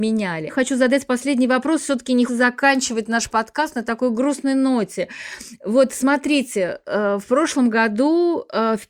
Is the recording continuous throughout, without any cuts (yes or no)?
no